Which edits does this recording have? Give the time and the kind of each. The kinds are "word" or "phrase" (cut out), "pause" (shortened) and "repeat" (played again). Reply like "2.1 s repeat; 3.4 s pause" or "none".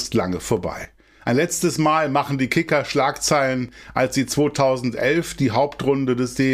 none